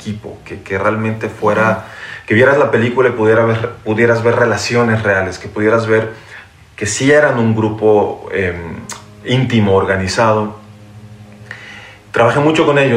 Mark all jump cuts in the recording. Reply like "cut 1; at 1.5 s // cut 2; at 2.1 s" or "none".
none